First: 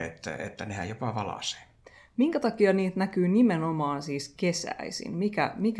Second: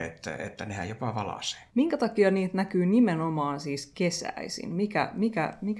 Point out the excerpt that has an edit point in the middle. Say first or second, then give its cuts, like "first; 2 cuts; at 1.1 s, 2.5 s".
second; 1 cut; at 1.7 s